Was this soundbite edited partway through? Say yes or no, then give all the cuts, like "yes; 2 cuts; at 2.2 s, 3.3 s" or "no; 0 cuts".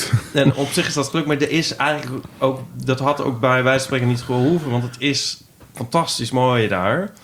no; 0 cuts